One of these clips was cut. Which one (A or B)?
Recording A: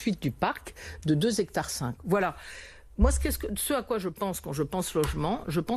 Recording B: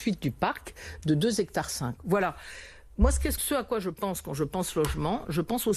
B